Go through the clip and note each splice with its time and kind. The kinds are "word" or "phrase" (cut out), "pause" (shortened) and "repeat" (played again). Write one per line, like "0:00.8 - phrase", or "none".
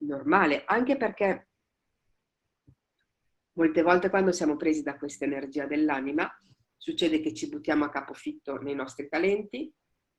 none